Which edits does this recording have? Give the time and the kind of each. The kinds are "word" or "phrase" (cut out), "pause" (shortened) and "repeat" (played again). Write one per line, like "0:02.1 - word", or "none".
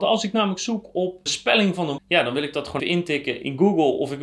0:01.3 - word
0:02.0 - word
0:02.8 - word